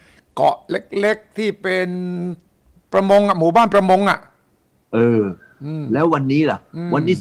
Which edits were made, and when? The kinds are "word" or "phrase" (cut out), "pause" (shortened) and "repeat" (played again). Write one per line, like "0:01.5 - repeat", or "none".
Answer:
none